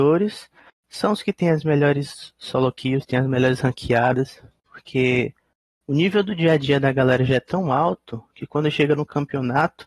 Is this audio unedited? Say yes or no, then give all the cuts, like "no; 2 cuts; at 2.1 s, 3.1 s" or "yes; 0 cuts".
yes; 0 cuts